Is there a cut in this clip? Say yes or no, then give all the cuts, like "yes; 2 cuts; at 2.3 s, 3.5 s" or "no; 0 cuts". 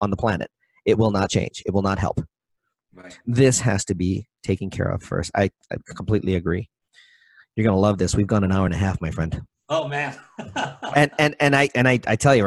no; 0 cuts